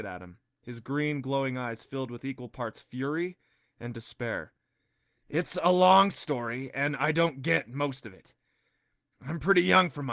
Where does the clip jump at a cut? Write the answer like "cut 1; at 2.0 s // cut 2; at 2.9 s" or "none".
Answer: none